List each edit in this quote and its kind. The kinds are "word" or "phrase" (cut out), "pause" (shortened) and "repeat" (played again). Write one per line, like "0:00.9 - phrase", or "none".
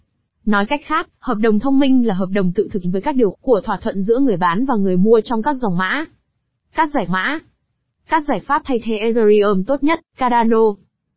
0:02.8 - word
0:03.3 - word
0:07.1 - repeat
0:10.1 - pause